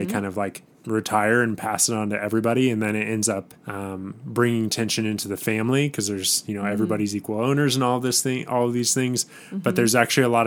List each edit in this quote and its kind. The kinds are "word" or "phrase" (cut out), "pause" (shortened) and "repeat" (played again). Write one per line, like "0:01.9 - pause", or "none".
0:03.6 - pause